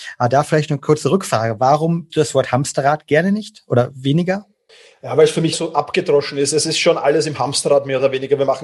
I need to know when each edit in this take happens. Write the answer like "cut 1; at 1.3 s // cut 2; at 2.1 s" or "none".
cut 1; at 2.1 s // cut 2; at 4.7 s // cut 3; at 5.5 s